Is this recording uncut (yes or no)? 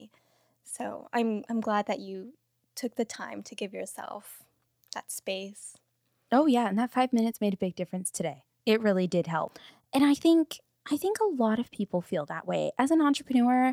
yes